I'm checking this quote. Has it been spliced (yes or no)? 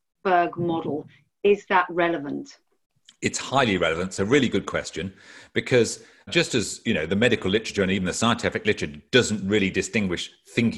no